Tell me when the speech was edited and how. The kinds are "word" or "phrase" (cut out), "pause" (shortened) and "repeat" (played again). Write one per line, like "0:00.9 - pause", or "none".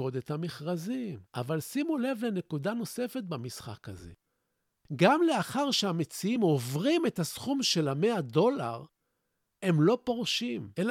none